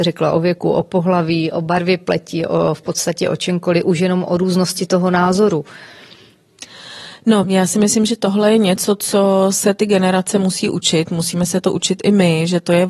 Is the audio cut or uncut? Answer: cut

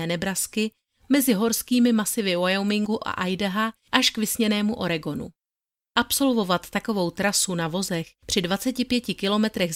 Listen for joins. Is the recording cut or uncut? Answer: uncut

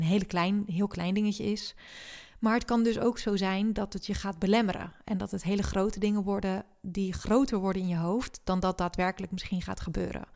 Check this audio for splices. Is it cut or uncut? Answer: uncut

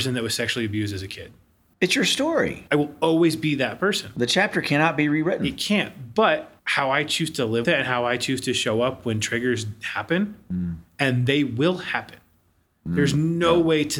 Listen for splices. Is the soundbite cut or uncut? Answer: cut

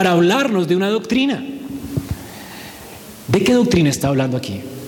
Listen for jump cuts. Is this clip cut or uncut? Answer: uncut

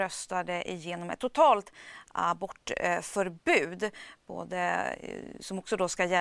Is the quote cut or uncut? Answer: uncut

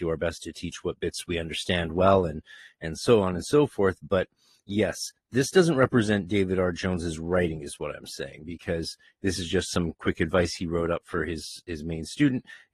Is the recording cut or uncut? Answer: uncut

